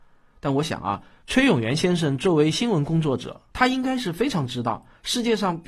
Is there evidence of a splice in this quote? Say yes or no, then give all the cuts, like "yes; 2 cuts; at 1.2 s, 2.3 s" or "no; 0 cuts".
no; 0 cuts